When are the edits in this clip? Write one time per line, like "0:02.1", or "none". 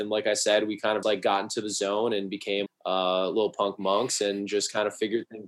0:01.0
0:02.7

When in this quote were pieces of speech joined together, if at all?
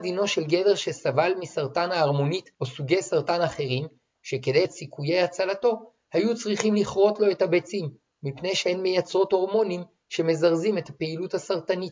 0:02.5
0:04.6

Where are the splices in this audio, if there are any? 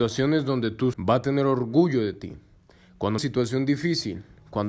0:00.9
0:03.2

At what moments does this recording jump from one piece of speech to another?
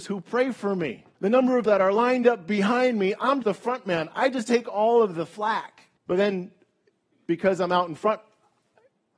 0:01.1
0:01.6
0:03.4
0:06.0

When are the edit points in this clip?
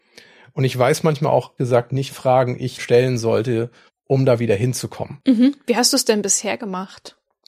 0:01.6
0:02.1
0:02.8
0:03.9

